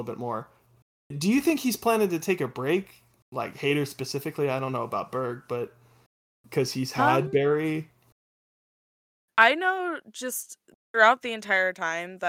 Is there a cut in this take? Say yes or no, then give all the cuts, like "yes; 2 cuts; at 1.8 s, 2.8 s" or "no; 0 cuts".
no; 0 cuts